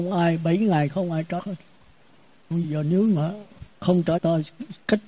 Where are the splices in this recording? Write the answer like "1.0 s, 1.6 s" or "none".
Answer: 1.4 s, 2.6 s, 3.7 s, 4.2 s